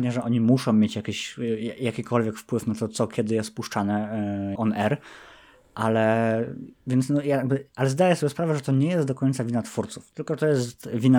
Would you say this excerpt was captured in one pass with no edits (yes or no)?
no